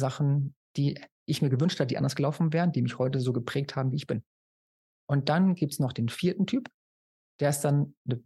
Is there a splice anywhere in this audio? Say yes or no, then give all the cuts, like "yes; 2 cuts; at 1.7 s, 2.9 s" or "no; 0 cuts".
no; 0 cuts